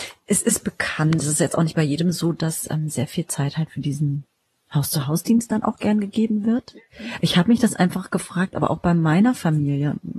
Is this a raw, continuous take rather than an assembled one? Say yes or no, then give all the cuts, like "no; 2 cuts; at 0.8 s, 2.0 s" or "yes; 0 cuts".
yes; 0 cuts